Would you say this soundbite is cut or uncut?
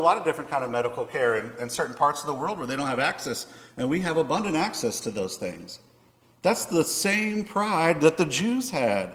uncut